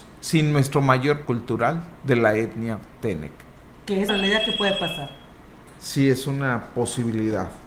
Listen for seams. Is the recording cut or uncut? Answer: cut